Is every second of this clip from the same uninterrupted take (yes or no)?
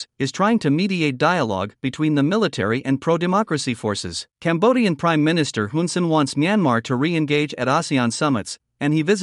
no